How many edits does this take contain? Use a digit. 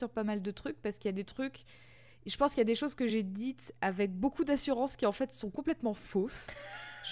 0